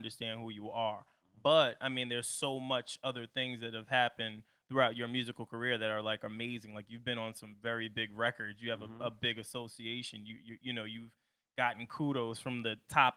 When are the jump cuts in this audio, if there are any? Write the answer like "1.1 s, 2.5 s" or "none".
none